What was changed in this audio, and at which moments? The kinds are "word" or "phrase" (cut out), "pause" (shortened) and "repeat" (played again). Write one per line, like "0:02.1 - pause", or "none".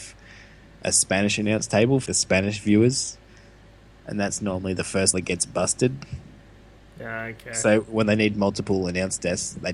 0:02.1 - word
0:05.1 - word

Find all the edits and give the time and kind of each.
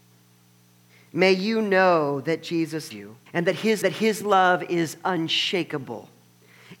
0:02.9 - word
0:03.3 - pause
0:03.8 - repeat

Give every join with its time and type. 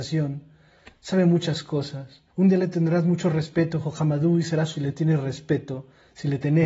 0:02.3 - pause
0:04.7 - phrase

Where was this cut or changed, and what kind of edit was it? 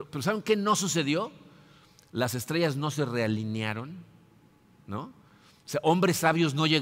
none

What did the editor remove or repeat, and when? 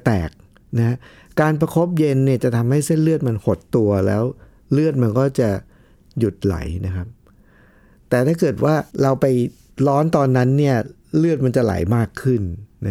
0:08.9 - pause

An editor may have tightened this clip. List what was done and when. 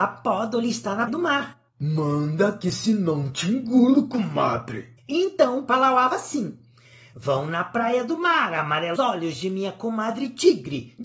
0:01.1 - word
0:01.7 - pause
0:05.0 - pause
0:06.1 - word
0:09.0 - word

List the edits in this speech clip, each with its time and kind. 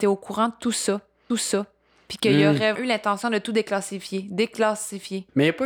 0:01.3 - repeat
0:02.7 - word

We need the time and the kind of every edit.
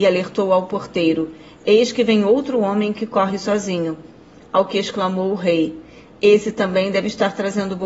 none

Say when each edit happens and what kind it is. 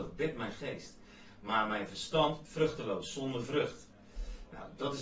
0:02.5 - word

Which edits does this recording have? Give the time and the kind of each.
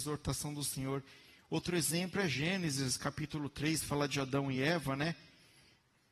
none

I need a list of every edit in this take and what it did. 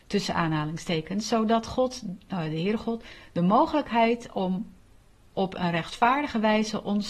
none

